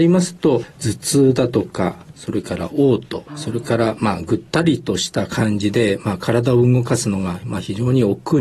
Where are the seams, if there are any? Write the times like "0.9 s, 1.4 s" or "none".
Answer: 3.3 s